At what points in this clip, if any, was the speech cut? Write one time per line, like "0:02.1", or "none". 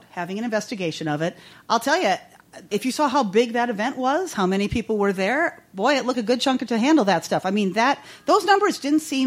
0:02.7
0:06.1
0:06.7